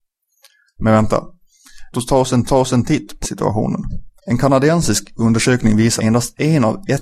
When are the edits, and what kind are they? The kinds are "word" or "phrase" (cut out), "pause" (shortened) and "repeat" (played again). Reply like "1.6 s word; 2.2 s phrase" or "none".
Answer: 1.9 s word; 2.5 s repeat; 3.2 s phrase; 4.2 s pause; 6.0 s word